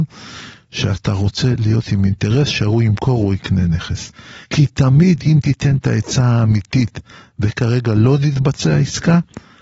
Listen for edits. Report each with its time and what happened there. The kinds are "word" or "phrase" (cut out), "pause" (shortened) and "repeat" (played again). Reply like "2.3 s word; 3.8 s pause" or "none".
4.4 s pause